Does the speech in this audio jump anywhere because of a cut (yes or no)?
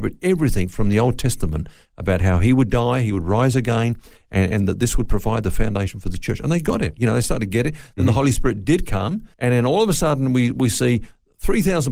yes